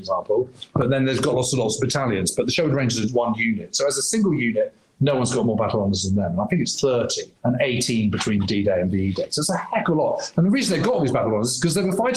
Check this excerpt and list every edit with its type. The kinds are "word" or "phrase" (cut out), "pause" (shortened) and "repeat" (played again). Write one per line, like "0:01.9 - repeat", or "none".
0:03.1 - word
0:07.4 - pause